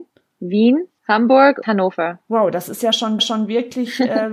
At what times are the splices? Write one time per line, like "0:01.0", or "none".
0:01.6
0:02.2
0:03.2